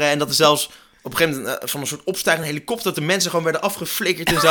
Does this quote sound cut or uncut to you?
uncut